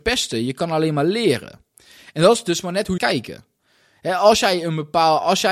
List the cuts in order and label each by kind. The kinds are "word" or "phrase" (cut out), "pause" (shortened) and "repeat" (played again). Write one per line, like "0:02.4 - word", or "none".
0:03.0 - phrase